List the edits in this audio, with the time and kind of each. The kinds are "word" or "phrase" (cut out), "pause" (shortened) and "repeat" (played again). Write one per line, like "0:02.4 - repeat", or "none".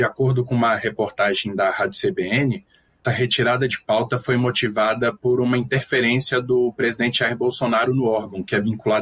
0:03.0 - word